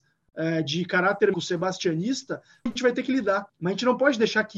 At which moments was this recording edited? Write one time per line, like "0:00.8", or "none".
0:01.3
0:02.7
0:03.5